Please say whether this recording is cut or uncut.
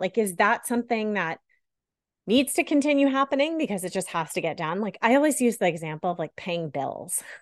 uncut